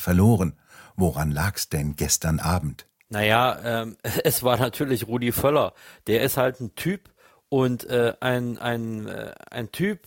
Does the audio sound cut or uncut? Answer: uncut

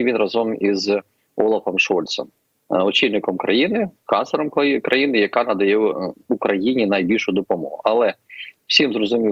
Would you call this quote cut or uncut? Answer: uncut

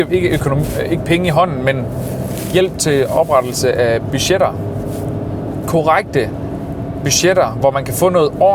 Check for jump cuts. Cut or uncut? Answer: uncut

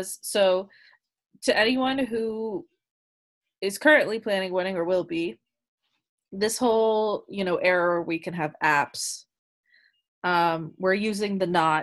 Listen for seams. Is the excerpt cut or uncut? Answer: uncut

